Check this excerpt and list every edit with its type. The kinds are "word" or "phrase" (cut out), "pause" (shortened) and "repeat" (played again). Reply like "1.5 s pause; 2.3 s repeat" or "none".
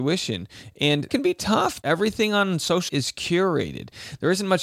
1.1 s word; 1.8 s word; 2.9 s word